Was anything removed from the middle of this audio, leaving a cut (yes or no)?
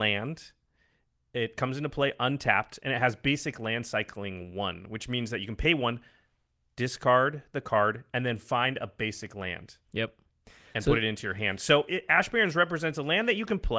no